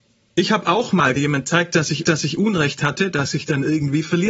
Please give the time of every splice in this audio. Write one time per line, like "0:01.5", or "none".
0:01.2
0:02.0

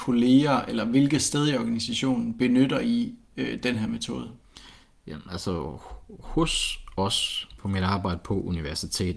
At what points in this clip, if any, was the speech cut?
none

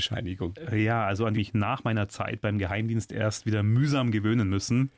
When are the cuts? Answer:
0:01.3

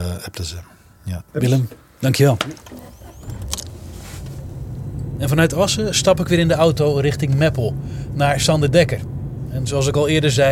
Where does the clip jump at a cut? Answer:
0:01.3

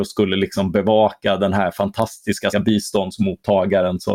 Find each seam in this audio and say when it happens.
0:02.5

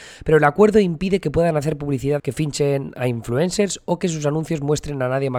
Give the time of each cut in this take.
0:02.2

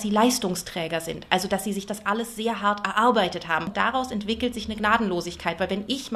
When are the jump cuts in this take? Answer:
none

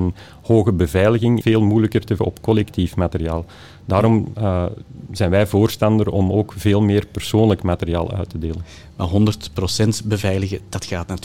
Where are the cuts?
0:01.4
0:02.2

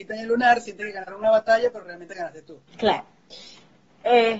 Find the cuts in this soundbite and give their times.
0:02.7

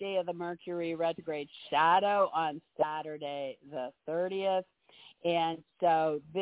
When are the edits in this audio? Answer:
none

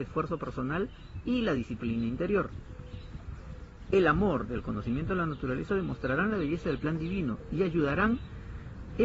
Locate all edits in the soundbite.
none

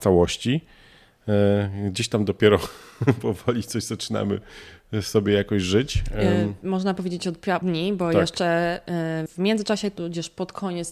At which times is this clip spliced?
0:07.6
0:09.3

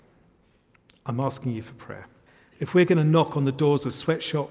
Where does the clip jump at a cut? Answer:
0:02.3

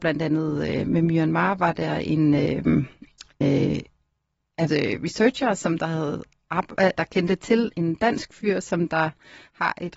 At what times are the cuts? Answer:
0:03.4
0:04.7
0:07.0
0:07.7

